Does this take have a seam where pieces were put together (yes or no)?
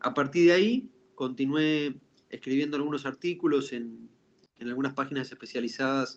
no